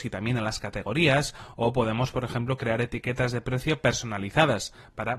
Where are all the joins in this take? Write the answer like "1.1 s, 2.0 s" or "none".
none